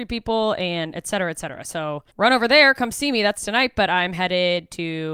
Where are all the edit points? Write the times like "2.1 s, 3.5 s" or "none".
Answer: 2.1 s